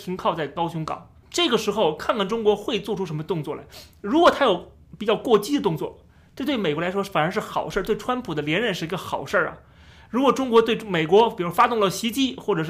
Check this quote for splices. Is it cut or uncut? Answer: uncut